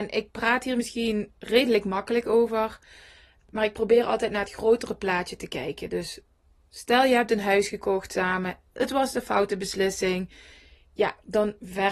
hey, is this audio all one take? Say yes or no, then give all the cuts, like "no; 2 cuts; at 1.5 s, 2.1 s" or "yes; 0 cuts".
yes; 0 cuts